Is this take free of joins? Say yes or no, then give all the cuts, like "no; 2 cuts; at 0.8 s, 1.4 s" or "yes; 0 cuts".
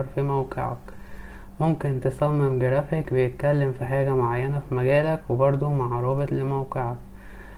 yes; 0 cuts